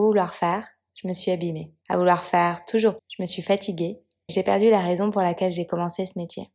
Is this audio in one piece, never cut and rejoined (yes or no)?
no